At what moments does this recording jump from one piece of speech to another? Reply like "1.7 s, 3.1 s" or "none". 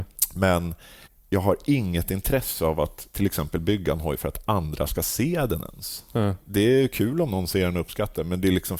1.0 s

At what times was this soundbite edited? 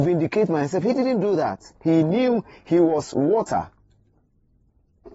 1.7 s

